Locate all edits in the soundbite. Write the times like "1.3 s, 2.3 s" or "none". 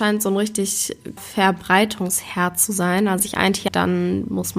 1.2 s, 3.2 s, 3.7 s